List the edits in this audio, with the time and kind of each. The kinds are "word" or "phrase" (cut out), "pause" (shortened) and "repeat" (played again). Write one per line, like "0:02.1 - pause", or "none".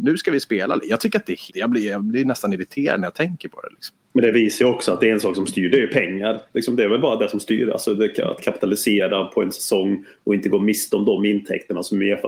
0:01.5 - word
0:04.0 - pause